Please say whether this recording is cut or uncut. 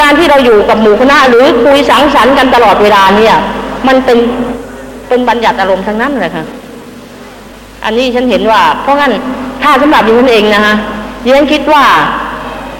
uncut